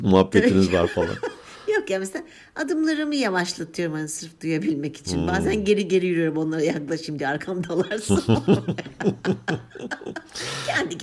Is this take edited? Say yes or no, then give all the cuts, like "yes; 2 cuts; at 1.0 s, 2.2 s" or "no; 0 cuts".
no; 0 cuts